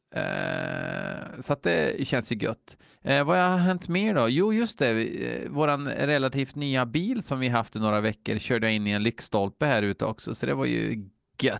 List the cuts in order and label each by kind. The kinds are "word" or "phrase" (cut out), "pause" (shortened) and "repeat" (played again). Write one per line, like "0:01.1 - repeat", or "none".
0:02.9 - pause